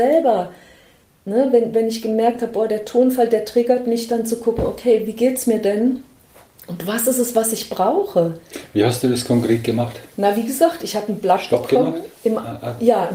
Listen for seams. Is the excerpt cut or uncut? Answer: uncut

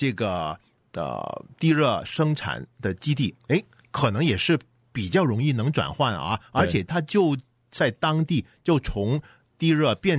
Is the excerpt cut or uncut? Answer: uncut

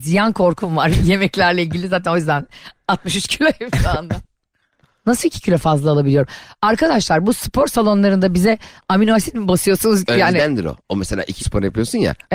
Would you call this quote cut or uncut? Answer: cut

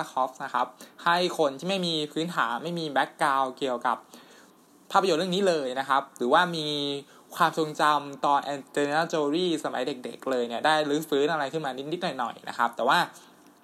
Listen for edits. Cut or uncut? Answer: uncut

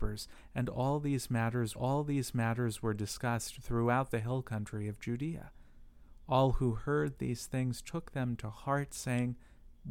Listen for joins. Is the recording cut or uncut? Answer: cut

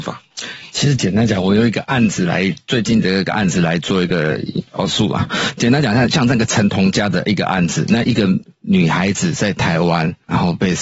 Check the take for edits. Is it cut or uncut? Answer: cut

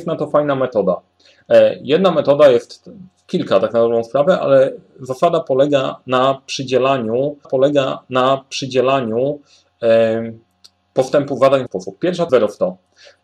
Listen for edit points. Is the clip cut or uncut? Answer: cut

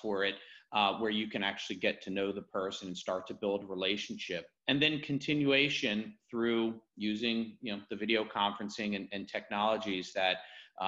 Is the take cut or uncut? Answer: cut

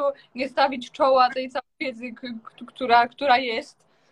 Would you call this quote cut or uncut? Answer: cut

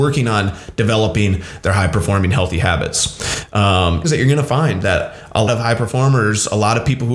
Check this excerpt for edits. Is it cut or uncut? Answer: cut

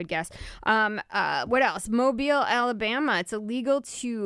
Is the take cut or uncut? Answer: uncut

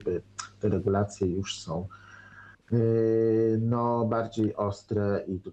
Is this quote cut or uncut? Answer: cut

